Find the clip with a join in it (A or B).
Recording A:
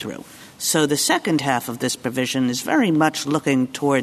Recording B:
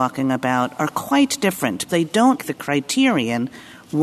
B